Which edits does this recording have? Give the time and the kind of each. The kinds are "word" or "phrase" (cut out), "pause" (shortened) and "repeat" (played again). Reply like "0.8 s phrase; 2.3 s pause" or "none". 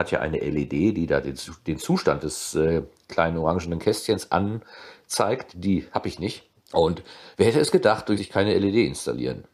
6.6 s pause; 8.2 s phrase

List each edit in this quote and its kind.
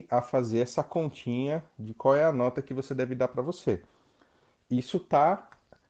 none

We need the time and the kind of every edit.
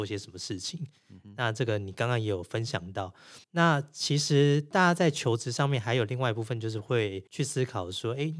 3.4 s pause; 7.3 s pause

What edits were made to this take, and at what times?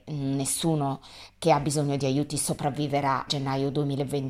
3.3 s word

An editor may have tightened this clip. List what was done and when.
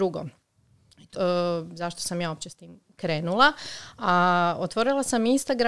1.1 s phrase

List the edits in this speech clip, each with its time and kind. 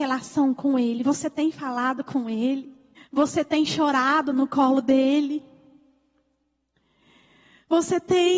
3.0 s pause

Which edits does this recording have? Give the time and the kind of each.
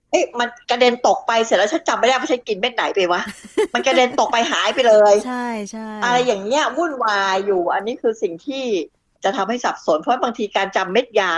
none

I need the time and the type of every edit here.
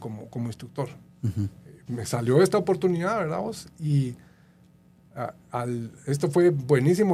1.9 s word

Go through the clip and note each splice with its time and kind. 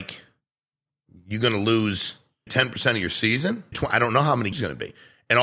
2.5 s word; 3.7 s word; 4.5 s word

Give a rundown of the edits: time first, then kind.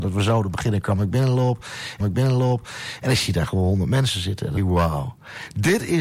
2.0 s repeat; 4.6 s phrase

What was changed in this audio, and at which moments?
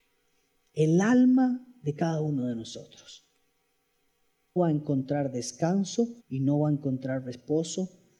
4.6 s word; 6.2 s pause

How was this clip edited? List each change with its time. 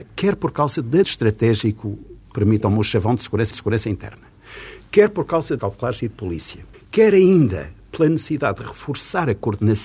1.0 s phrase; 3.5 s repeat; 5.6 s phrase; 6.7 s pause

